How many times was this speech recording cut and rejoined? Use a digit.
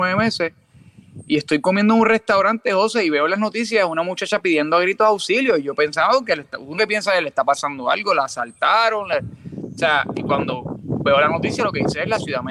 1